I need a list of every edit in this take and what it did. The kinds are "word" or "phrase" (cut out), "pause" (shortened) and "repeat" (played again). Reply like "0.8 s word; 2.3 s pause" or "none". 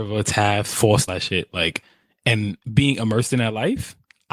1.1 s word; 2.6 s pause